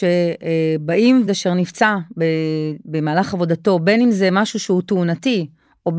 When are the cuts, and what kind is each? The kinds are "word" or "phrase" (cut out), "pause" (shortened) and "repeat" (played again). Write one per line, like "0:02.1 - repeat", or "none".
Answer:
0:01.3 - phrase